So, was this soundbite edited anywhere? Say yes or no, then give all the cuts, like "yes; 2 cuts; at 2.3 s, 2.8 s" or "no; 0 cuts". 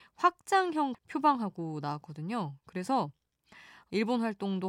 yes; 1 cut; at 0.9 s